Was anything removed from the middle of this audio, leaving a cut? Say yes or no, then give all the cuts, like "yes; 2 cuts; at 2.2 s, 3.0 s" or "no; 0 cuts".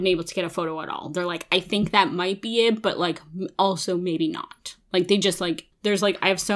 no; 0 cuts